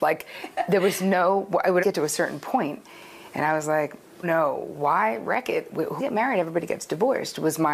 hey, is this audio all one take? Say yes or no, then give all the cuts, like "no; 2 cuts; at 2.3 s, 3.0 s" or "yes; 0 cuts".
no; 3 cuts; at 1.8 s, 4.2 s, 6.0 s